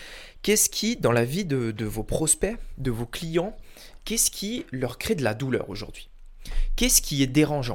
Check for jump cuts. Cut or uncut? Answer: uncut